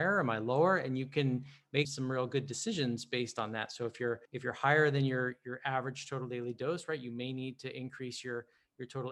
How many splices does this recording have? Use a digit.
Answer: 2